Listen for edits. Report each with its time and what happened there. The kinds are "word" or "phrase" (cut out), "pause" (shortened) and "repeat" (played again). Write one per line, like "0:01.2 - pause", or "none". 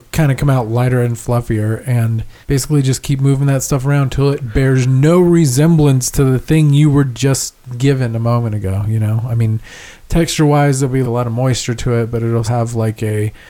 0:02.4 - pause
0:11.0 - word
0:12.4 - word